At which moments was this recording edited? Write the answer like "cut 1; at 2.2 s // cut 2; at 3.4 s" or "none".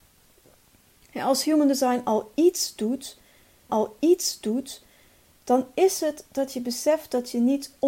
cut 1; at 3.7 s